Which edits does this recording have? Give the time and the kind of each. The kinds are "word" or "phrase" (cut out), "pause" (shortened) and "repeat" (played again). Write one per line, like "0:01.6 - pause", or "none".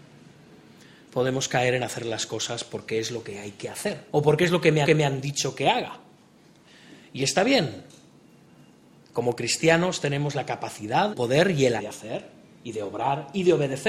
0:04.1 - pause
0:04.8 - repeat
0:11.1 - word
0:11.8 - word